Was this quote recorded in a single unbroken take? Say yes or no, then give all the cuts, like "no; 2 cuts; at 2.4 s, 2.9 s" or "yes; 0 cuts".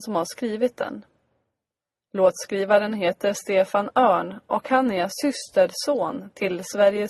yes; 0 cuts